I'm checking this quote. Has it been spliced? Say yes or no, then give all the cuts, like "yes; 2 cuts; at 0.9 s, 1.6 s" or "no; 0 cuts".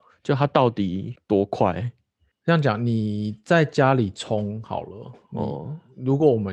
no; 0 cuts